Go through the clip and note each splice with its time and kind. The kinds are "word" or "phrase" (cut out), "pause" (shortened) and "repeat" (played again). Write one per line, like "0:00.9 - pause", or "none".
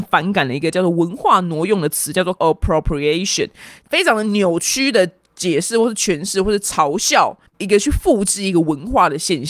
0:02.4 - word
0:07.5 - pause

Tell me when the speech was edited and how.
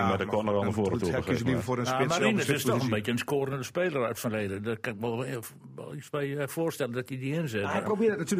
none

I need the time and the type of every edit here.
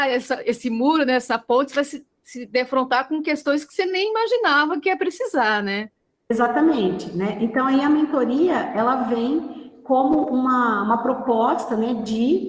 none

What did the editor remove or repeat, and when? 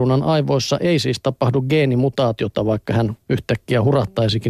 0:03.2 - pause

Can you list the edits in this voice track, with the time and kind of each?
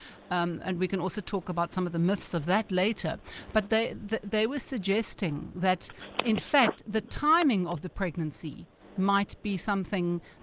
none

